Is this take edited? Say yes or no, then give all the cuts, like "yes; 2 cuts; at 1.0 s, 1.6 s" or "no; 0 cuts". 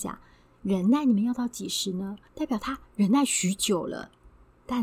yes; 1 cut; at 2.3 s